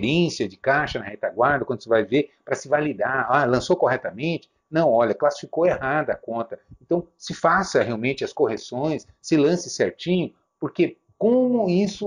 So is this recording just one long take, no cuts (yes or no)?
yes